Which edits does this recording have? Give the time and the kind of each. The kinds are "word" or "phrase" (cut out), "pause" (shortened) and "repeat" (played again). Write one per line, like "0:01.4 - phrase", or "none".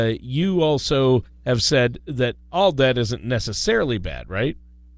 none